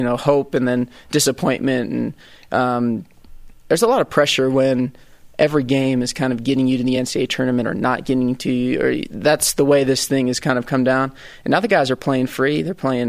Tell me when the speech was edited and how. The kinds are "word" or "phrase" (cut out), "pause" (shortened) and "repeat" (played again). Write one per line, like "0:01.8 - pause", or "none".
none